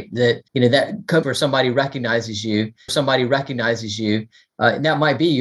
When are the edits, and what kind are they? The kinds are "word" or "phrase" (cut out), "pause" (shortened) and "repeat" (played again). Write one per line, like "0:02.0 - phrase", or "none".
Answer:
0:01.2 - phrase
0:02.9 - repeat